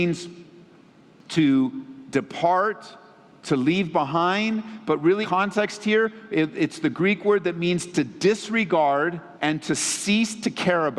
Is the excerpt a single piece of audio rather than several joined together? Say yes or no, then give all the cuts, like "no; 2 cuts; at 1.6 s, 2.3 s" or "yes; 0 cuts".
no; 2 cuts; at 5.2 s, 9.3 s